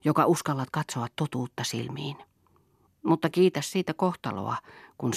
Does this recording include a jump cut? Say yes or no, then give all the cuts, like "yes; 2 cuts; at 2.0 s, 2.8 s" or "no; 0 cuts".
no; 0 cuts